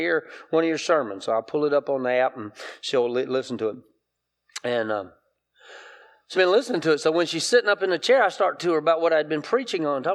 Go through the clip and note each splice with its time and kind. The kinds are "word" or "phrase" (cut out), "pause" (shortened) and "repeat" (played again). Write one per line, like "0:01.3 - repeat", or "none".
0:06.3 - word
0:08.6 - word